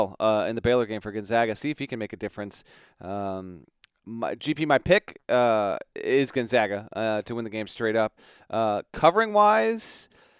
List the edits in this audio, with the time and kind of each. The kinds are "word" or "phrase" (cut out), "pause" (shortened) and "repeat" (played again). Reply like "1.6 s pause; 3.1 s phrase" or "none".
none